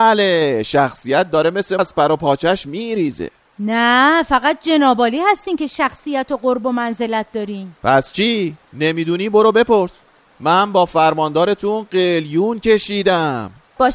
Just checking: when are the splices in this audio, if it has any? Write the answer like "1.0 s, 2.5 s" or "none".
1.8 s